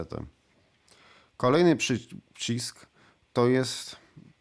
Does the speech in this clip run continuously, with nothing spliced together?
yes; 0 cuts

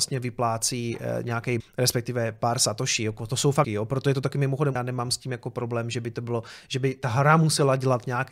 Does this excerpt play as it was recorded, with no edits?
no; 3 cuts; at 1.6 s, 3.6 s, 4.8 s

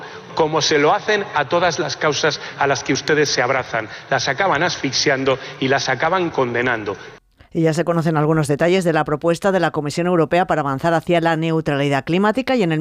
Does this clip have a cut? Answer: no; 0 cuts

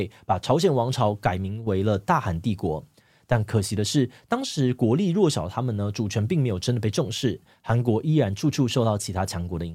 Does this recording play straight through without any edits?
yes; 0 cuts

